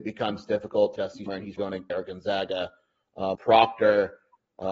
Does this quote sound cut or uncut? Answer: cut